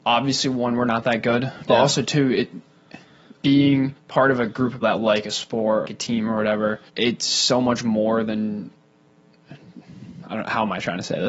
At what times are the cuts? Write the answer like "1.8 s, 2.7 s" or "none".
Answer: 3.4 s, 4.0 s, 4.8 s, 5.8 s, 6.9 s